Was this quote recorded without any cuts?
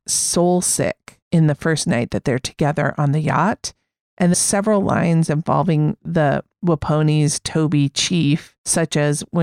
no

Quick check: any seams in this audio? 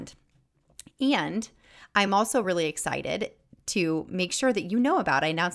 no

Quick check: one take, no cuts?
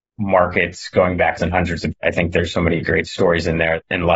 no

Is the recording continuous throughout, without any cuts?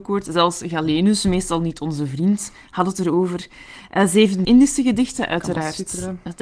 no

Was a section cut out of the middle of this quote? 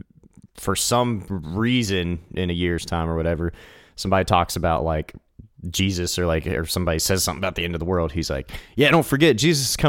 no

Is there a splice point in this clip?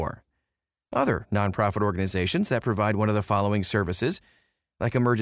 no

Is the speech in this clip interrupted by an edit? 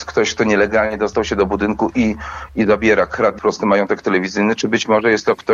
yes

